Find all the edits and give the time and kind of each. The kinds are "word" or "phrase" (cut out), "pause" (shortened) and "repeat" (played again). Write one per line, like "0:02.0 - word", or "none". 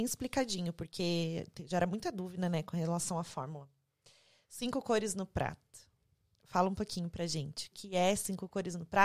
0:07.7 - word